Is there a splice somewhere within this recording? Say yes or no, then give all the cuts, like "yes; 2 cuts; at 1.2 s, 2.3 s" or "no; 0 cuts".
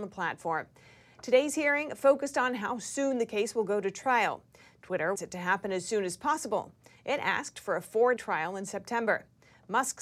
yes; 2 cuts; at 5.2 s, 8.2 s